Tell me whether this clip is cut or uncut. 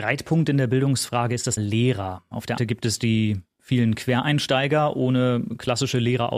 cut